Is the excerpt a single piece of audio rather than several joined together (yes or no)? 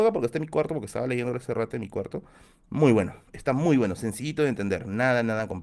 yes